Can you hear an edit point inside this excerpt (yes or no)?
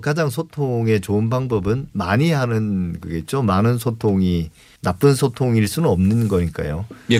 no